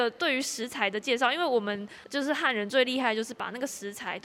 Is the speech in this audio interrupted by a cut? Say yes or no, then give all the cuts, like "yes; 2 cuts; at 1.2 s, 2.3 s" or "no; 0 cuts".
yes; 1 cut; at 2.0 s